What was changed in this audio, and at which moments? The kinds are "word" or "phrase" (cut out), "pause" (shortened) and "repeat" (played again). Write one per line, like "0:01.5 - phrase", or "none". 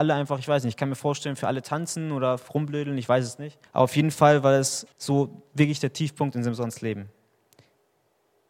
0:03.7 - pause
0:04.9 - pause